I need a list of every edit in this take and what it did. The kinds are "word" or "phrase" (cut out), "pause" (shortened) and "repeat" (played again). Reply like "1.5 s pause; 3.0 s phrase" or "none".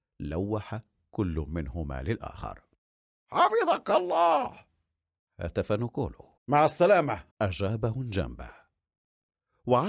6.4 s pause; 7.3 s pause

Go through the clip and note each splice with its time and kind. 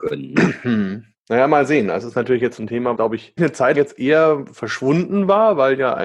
2.0 s word; 2.9 s word; 3.4 s word; 3.7 s word

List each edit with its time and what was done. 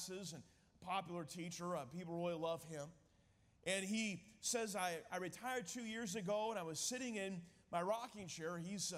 none

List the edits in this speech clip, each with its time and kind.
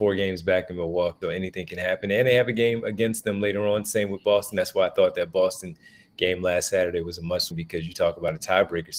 1.2 s word; 7.5 s word

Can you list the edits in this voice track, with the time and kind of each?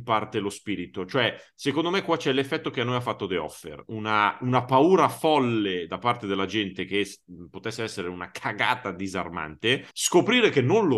9.9 s pause

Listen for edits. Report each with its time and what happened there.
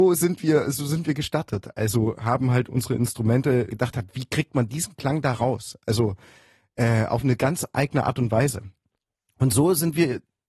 3.7 s phrase

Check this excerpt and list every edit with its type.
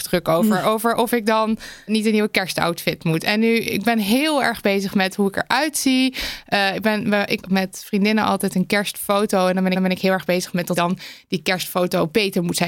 1.9 s word; 7.4 s word; 9.7 s repeat; 10.8 s word

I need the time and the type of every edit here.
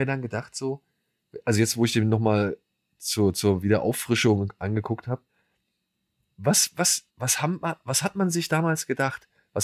7.1 s pause

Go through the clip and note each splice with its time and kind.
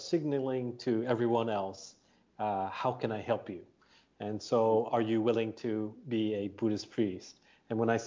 none

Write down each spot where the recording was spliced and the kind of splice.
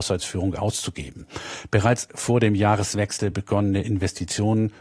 none

